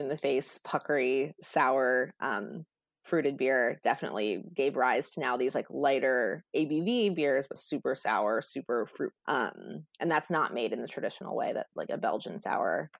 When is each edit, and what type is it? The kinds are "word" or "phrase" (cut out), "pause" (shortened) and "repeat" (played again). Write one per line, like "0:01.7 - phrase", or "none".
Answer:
0:07.6 - word
0:09.2 - word